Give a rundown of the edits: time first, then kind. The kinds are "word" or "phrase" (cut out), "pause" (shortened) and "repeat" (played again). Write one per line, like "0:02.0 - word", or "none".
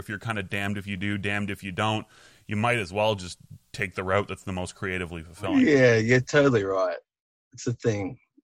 none